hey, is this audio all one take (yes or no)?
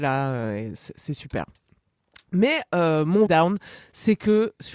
no